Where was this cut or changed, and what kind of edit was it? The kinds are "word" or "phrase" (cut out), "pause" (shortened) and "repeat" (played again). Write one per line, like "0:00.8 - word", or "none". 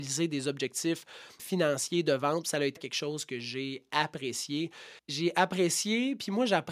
0:01.4 - word
0:02.8 - word
0:05.0 - pause